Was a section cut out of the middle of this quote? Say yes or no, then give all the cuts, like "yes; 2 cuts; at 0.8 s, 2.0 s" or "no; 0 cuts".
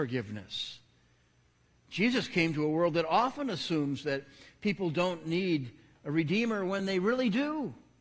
no; 0 cuts